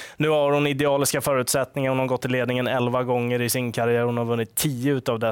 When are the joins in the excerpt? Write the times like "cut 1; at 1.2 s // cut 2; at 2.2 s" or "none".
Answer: none